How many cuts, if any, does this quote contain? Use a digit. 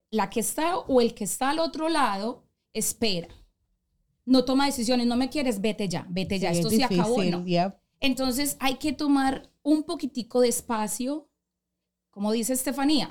0